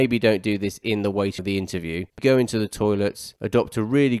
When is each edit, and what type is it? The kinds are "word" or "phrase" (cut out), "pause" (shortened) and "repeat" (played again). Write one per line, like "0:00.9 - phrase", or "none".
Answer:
0:01.4 - word
0:02.2 - word

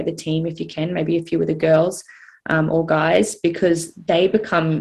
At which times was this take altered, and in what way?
none

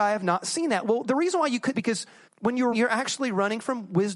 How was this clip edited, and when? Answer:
0:01.0 - word
0:01.7 - phrase
0:02.3 - pause
0:02.7 - word

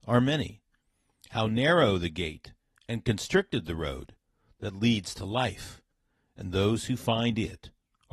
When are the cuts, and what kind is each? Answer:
none

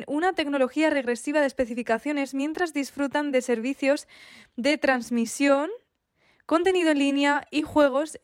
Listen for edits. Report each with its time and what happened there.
none

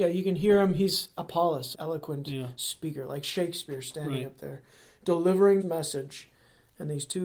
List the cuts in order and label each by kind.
0:01.7 - phrase
0:05.6 - word

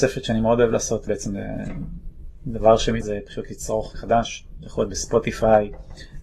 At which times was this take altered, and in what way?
0:01.1 - word
0:03.0 - phrase
0:03.9 - word

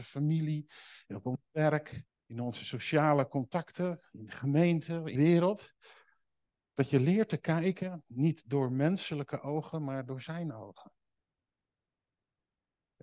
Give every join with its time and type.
0:02.1 - pause
0:05.1 - word

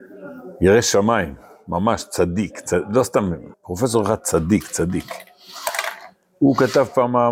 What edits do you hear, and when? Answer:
0:03.5 - pause

